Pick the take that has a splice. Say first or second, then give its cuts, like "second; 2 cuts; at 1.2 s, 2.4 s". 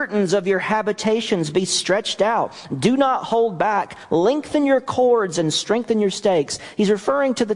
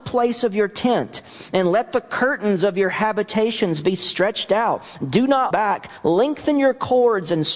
second; 1 cut; at 5.5 s